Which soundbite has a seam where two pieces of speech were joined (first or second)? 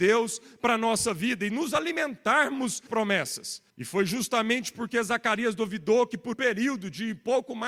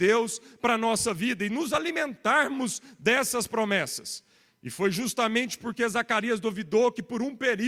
first